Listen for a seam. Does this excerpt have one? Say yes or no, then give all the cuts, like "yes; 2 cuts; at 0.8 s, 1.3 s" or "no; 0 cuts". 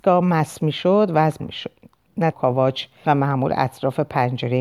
yes; 3 cuts; at 1.4 s, 2.3 s, 3.0 s